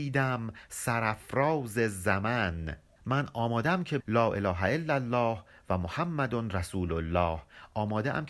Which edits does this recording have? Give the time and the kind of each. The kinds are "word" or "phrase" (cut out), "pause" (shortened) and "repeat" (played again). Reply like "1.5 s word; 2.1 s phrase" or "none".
4.0 s word

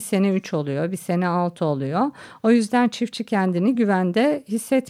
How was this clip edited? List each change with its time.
none

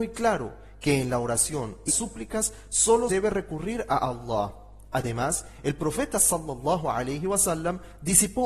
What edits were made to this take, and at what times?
1.9 s word; 3.1 s word

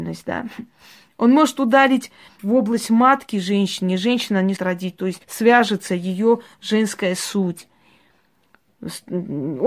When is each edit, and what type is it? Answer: 2.4 s word; 4.6 s word; 5.2 s pause

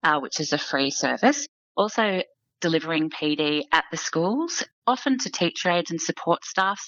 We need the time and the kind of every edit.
none

